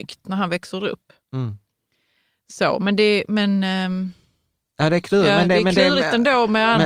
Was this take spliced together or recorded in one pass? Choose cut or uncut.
uncut